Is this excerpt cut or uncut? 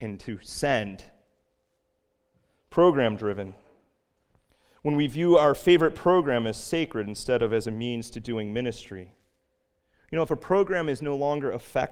uncut